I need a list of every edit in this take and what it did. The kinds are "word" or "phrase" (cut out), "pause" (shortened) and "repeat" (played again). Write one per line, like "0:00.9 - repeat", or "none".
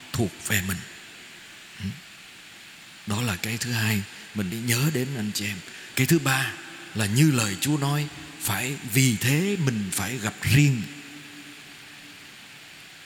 0:04.5 - word
0:05.9 - word